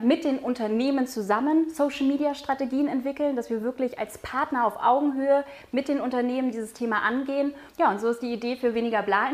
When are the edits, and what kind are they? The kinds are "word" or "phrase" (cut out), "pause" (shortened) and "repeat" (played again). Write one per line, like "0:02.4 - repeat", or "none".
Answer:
none

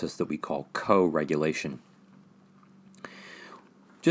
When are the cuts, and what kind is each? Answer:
none

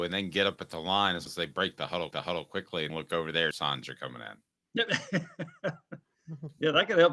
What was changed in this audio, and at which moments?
0:01.3 - word
0:02.1 - repeat
0:02.9 - word
0:03.5 - phrase

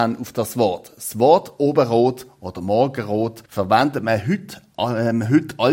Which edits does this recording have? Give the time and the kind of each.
0:03.5 - pause

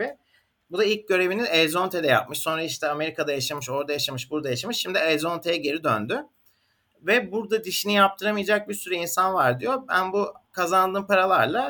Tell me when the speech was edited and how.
none

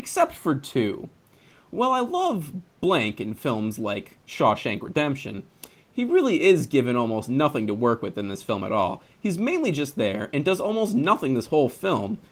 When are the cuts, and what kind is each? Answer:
none

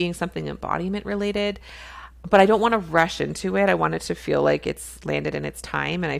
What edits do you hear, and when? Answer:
none

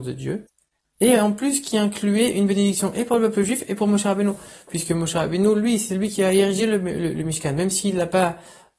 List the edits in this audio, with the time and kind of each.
none

